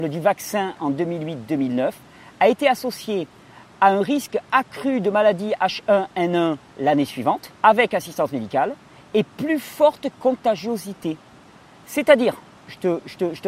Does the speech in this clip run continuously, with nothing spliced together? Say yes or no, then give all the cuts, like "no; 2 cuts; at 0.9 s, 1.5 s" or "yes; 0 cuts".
no; 1 cut; at 7.6 s